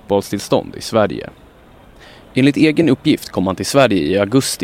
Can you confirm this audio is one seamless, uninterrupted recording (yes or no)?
yes